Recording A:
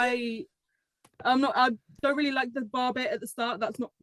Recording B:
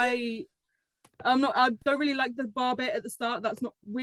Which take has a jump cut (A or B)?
B